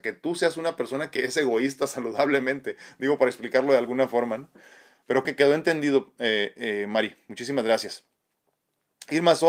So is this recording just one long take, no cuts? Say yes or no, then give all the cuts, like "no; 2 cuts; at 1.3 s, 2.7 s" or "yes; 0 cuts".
no; 1 cut; at 5.2 s